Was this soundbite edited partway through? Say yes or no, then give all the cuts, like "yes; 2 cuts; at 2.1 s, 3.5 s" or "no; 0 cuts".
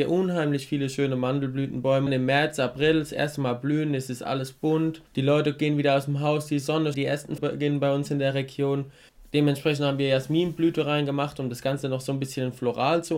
yes; 5 cuts; at 2.1 s, 5.1 s, 6.9 s, 7.4 s, 9.1 s